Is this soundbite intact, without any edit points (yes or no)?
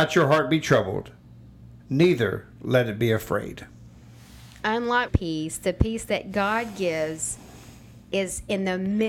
no